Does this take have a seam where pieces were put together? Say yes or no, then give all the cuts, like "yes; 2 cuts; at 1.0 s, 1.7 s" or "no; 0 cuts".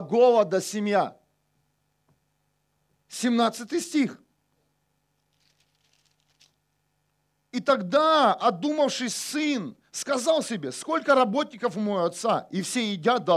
no; 0 cuts